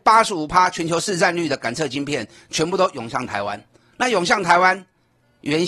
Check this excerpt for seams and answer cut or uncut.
uncut